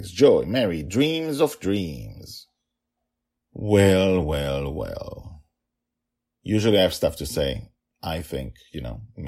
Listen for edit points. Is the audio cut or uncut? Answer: uncut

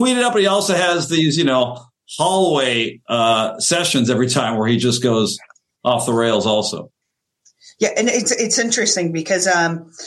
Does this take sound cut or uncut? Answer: uncut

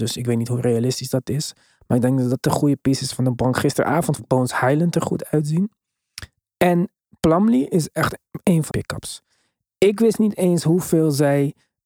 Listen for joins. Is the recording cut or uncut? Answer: cut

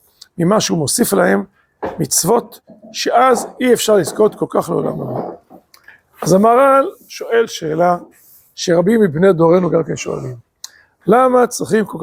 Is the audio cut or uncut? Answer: uncut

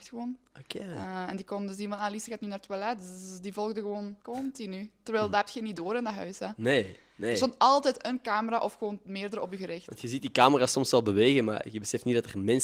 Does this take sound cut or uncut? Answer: cut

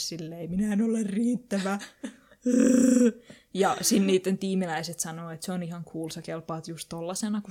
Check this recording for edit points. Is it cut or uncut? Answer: uncut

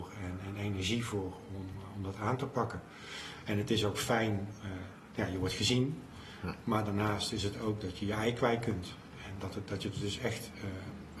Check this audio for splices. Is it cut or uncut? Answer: uncut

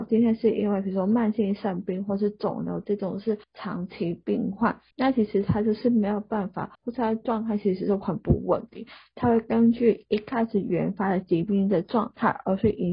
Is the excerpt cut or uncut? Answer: cut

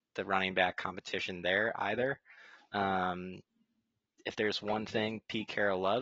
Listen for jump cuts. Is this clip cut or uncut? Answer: uncut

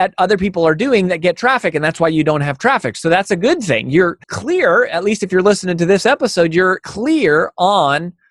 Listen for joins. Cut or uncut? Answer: cut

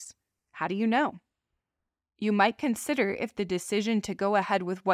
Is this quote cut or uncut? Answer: uncut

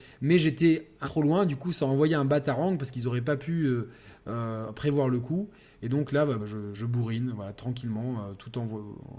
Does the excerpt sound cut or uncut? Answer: cut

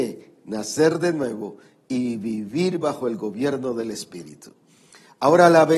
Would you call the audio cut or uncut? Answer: uncut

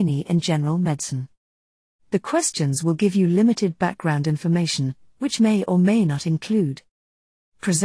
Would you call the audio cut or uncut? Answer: uncut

